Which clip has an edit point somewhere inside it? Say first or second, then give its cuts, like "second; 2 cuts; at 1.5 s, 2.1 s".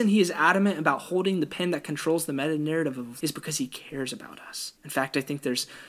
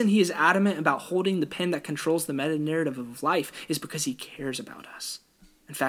first; 2 cuts; at 3.2 s, 4.8 s